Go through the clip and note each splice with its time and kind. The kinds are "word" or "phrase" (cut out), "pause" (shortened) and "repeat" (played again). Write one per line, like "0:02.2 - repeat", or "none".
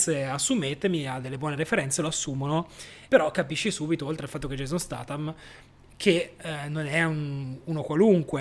0:03.1 - pause